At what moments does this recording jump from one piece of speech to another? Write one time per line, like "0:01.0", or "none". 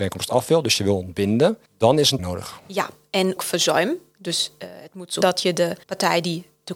0:01.7
0:02.2
0:03.4
0:05.2
0:05.8